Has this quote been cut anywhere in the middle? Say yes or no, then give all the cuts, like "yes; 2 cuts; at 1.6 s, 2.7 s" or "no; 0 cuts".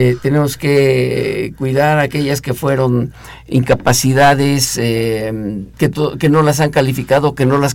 yes; 1 cut; at 5.7 s